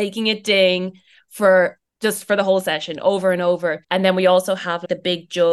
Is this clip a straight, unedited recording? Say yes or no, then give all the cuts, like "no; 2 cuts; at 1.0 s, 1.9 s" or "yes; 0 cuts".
no; 2 cuts; at 1.9 s, 3.8 s